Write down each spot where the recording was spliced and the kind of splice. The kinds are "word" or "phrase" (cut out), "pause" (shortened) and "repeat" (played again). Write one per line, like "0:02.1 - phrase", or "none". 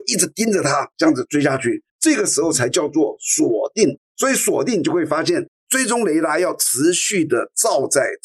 0:00.9 - pause
0:01.9 - pause